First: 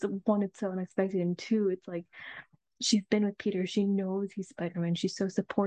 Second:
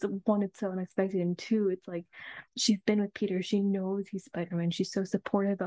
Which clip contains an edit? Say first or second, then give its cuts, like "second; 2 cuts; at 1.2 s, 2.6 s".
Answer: second; 1 cut; at 2.5 s